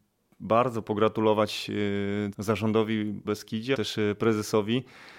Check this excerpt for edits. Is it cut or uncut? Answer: cut